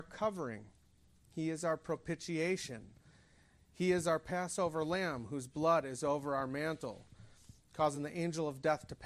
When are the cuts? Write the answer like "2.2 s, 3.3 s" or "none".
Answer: none